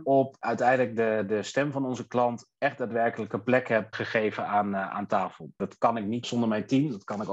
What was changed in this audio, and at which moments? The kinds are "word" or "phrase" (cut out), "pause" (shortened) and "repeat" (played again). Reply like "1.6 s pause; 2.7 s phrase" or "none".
3.9 s word; 6.2 s word